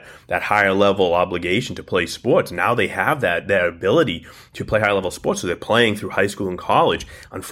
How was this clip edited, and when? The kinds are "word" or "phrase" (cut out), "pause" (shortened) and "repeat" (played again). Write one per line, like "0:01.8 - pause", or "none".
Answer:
none